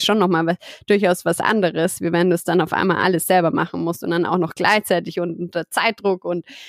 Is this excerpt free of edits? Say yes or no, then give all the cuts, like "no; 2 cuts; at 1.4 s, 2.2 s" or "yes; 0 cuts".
yes; 0 cuts